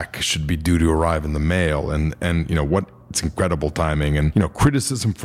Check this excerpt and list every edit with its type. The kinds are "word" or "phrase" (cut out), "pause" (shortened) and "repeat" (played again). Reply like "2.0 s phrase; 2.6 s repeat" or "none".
none